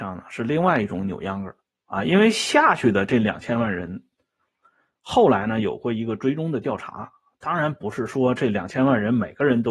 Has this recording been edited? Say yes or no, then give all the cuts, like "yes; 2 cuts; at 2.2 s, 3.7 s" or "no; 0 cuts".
no; 0 cuts